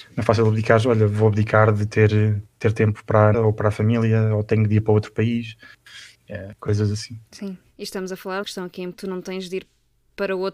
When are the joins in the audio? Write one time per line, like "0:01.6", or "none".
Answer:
0:02.5
0:03.3
0:06.1
0:07.3
0:08.4
0:08.9